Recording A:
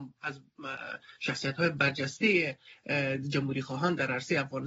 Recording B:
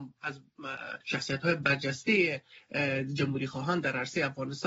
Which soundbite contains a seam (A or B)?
B